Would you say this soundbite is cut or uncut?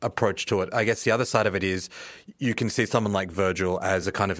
uncut